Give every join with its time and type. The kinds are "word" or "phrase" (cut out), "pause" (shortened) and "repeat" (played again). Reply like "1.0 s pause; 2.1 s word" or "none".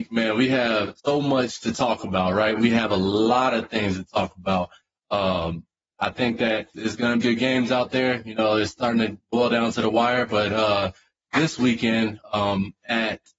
1.0 s pause; 6.7 s word; 7.2 s phrase; 9.2 s word